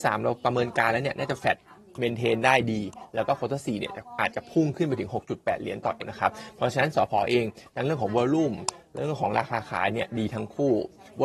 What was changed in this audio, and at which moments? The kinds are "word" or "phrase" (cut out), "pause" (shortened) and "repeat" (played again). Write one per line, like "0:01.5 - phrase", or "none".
0:06.0 - word